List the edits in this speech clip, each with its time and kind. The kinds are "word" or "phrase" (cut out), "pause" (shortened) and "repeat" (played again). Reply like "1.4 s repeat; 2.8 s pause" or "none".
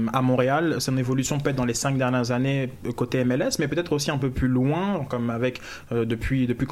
none